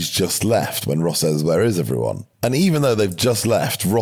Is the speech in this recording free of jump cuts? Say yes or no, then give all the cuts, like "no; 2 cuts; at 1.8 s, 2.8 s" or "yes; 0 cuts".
no; 1 cut; at 2.3 s